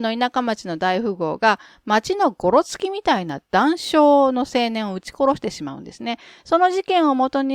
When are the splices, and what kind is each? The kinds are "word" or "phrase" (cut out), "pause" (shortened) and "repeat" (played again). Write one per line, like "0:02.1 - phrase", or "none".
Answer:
none